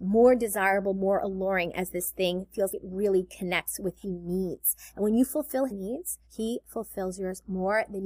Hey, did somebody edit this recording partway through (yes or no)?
yes